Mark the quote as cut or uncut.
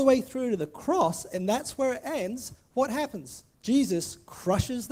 cut